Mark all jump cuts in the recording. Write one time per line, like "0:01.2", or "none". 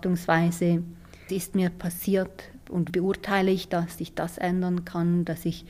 0:01.3
0:02.9
0:04.0